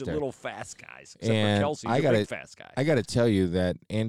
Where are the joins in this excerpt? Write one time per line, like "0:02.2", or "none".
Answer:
none